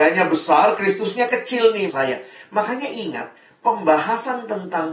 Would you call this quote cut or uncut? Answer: cut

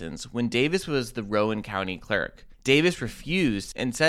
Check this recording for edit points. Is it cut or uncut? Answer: cut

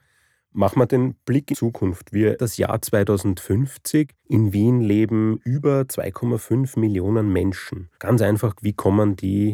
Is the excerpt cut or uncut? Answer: cut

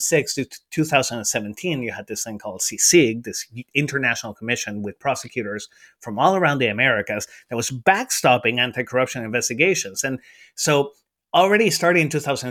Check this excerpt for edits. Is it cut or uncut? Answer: uncut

